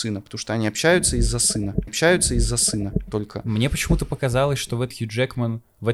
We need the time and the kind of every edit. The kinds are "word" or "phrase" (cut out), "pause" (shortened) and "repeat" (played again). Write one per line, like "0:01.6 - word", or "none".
0:01.9 - repeat
0:04.9 - word